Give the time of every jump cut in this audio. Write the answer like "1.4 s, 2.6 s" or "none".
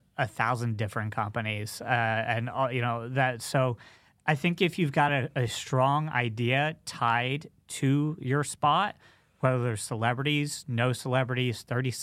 none